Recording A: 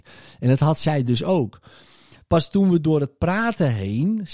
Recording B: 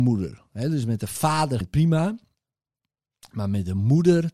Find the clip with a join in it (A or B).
B